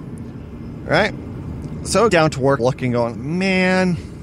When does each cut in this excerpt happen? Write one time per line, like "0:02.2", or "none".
0:02.1
0:02.6
0:03.1

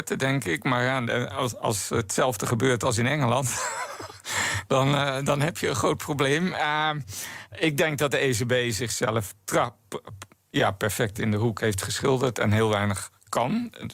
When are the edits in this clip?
none

